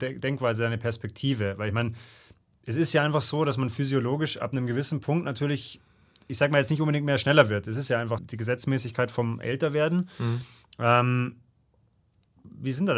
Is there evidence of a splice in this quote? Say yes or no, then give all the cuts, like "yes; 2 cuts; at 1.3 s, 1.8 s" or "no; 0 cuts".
yes; 1 cut; at 8.2 s